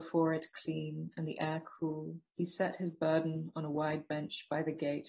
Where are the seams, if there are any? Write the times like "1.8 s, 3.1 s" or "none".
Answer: 2.3 s